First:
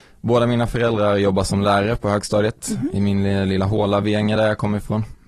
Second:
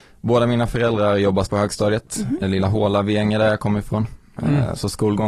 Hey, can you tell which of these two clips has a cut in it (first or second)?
second